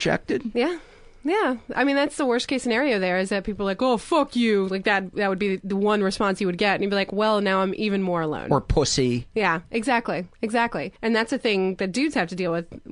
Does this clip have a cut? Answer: yes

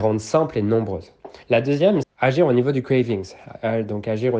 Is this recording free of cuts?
no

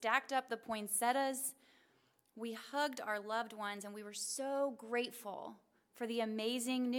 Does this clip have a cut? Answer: no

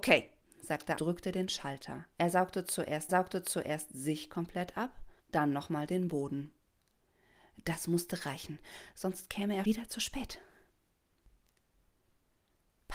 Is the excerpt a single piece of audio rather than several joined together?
no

